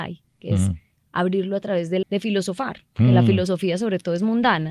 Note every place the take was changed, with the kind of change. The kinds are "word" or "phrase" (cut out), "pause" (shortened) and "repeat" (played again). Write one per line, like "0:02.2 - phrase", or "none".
0:02.0 - word